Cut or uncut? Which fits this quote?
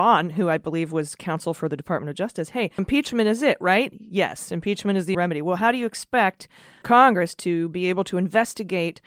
cut